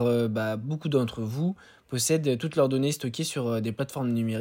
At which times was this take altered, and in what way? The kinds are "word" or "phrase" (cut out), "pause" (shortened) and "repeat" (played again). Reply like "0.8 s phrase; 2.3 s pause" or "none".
none